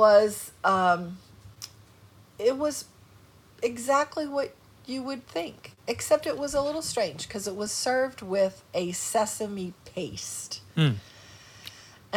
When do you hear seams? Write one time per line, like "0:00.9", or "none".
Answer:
none

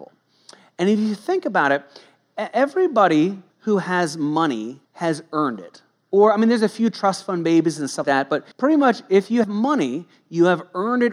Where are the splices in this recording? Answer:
0:03.5
0:04.8
0:08.0
0:08.5
0:09.4

